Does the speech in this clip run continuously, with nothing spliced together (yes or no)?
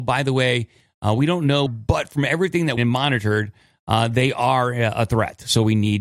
no